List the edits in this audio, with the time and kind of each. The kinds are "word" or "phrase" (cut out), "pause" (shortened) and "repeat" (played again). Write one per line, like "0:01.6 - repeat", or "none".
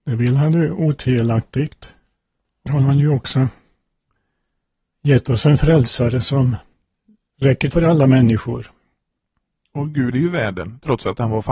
0:02.7 - word
0:07.7 - word
0:10.1 - word